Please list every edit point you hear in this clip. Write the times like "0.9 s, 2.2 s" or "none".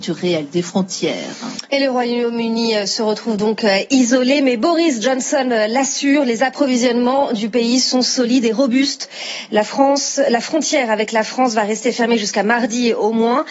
none